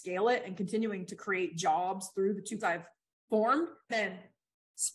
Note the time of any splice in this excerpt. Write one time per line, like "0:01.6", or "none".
0:02.6
0:03.9